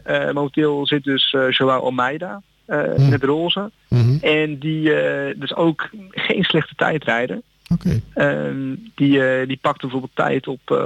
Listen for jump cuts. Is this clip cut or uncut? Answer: uncut